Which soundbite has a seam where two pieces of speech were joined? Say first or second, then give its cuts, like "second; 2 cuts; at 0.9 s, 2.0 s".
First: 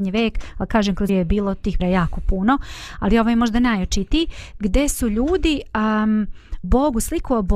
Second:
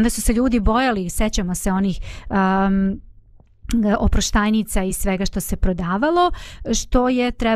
first; 3 cuts; at 1.1 s, 1.8 s, 6.6 s